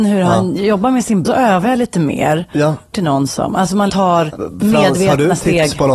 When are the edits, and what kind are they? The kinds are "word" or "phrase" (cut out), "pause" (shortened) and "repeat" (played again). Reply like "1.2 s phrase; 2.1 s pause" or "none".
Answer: 1.2 s phrase; 2.9 s phrase; 3.9 s word